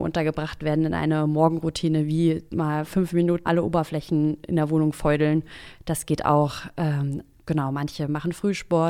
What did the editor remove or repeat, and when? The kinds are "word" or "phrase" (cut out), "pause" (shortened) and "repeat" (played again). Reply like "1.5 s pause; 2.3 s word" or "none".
2.5 s pause; 3.4 s word